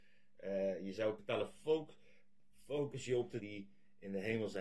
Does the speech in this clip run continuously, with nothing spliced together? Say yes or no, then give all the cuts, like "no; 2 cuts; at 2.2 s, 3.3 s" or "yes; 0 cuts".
no; 2 cuts; at 1.2 s, 3.4 s